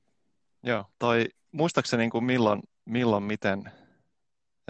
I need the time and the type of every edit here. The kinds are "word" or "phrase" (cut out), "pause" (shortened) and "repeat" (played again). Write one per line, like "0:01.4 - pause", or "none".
0:00.9 - pause